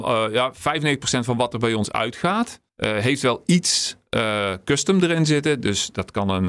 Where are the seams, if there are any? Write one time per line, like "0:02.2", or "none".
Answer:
0:02.7